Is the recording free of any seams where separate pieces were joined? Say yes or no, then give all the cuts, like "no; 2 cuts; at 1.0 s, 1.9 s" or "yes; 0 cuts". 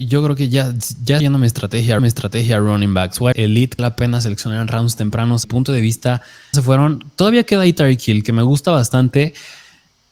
no; 6 cuts; at 1.2 s, 2.0 s, 3.3 s, 3.8 s, 5.4 s, 6.5 s